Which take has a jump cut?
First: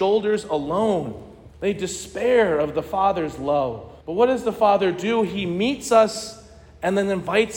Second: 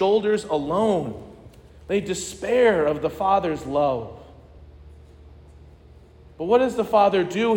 first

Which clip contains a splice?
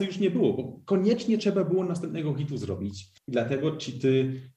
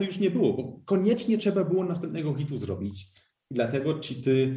first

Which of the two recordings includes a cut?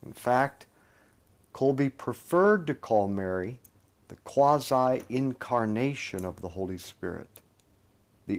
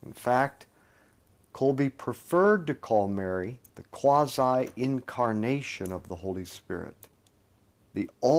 second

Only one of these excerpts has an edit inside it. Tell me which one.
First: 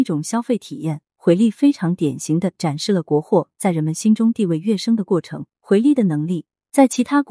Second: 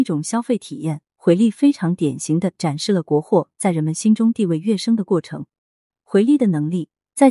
first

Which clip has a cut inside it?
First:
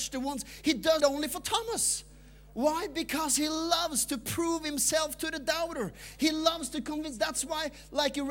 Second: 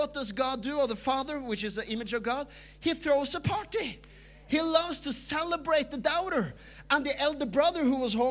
first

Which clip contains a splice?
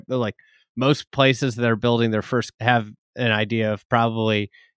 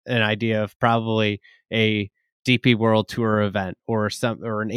first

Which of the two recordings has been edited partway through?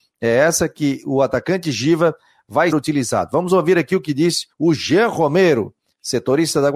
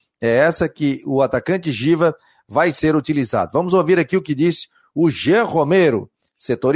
first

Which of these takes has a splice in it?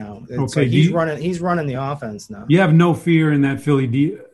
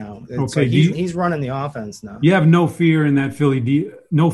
second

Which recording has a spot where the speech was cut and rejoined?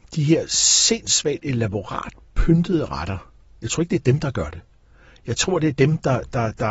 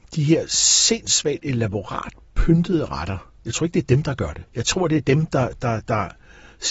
second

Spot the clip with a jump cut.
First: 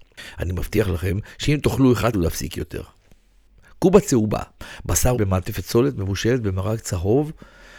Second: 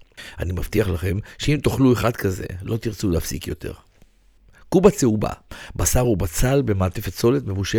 first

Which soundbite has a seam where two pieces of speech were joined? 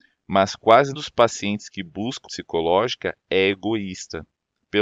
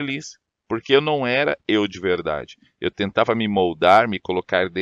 first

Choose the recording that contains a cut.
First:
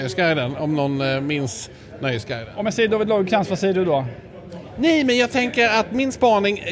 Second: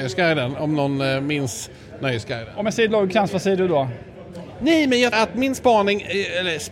second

